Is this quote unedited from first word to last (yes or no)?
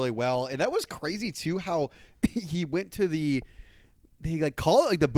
yes